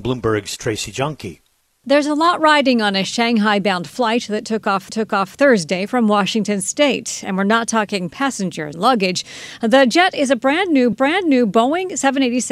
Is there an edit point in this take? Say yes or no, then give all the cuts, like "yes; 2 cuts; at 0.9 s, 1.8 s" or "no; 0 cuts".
yes; 3 cuts; at 4.9 s, 8.7 s, 10.9 s